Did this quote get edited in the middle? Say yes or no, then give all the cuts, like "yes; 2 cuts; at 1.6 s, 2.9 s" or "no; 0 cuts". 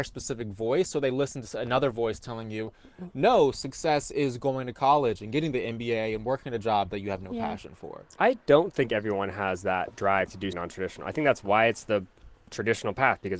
yes; 1 cut; at 10.5 s